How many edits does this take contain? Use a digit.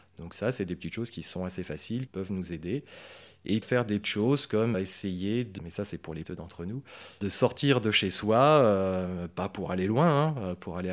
7